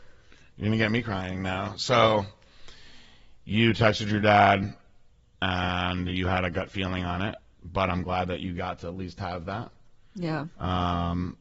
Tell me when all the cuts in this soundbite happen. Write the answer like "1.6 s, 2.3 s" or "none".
none